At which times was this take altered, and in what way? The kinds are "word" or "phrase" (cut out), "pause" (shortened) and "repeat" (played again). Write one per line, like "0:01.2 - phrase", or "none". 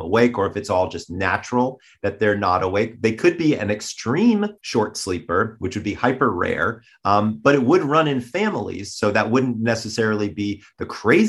0:04.6 - pause